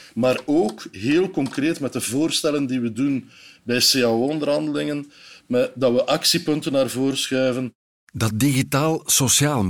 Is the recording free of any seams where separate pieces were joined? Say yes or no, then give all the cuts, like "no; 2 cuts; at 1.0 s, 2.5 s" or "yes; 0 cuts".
yes; 0 cuts